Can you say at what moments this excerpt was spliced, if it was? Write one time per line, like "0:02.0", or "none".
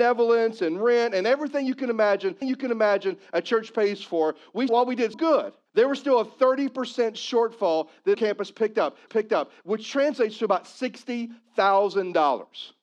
0:02.4
0:04.7
0:05.1
0:05.7
0:08.1
0:09.1